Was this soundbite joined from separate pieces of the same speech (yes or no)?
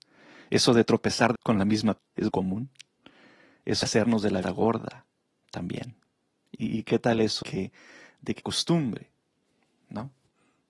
yes